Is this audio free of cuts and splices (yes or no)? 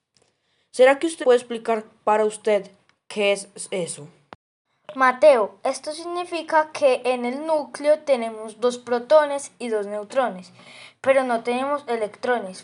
no